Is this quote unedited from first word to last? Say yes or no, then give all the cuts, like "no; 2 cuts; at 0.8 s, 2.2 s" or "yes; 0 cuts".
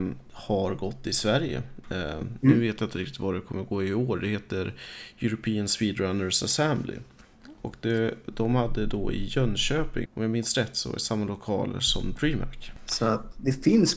no; 1 cut; at 10.1 s